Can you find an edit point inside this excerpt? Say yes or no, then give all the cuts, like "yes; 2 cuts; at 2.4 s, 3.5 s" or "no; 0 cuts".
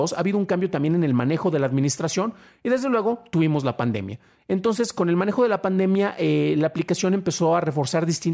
no; 0 cuts